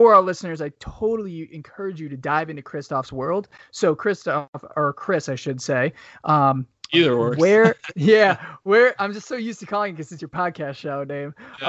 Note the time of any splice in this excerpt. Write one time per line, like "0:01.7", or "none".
none